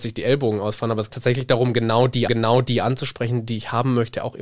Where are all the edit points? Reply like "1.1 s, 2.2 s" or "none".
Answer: 1.1 s, 2.3 s